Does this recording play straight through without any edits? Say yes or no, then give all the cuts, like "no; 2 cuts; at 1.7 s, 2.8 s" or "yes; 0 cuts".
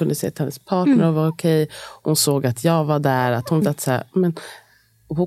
no; 1 cut; at 3.6 s